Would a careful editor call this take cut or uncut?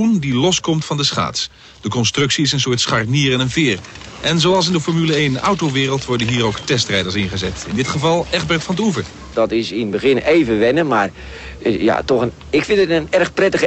uncut